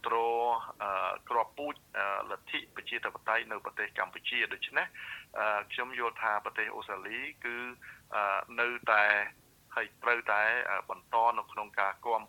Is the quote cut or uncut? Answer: uncut